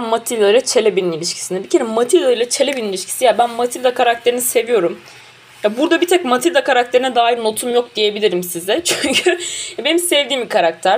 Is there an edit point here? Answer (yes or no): no